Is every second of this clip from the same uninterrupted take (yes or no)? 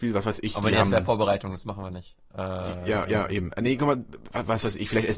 no